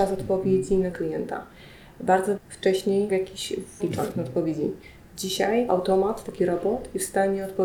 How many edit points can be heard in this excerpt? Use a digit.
5